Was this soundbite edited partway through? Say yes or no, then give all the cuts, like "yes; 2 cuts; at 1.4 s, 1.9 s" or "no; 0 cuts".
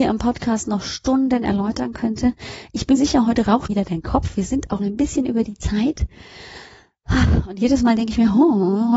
yes; 3 cuts; at 3.0 s, 3.7 s, 4.8 s